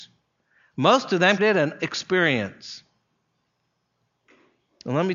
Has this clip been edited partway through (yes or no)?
yes